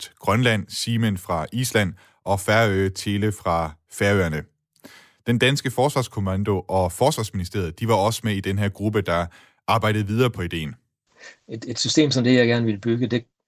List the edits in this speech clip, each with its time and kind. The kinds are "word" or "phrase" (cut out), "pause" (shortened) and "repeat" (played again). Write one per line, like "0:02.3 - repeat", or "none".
none